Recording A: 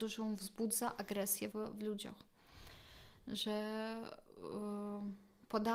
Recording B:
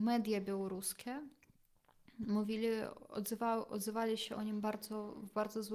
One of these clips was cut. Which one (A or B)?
A